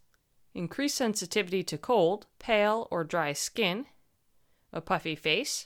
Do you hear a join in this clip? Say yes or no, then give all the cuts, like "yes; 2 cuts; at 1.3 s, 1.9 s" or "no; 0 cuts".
yes; 1 cut; at 2.3 s